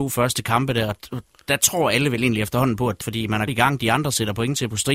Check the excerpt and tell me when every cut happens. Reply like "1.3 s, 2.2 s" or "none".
3.0 s, 3.5 s